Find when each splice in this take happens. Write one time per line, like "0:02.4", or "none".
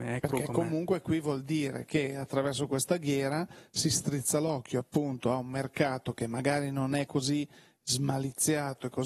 none